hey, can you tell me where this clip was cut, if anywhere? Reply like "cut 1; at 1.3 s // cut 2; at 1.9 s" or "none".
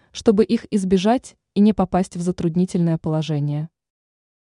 none